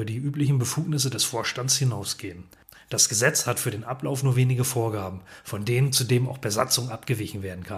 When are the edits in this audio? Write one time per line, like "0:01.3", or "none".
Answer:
none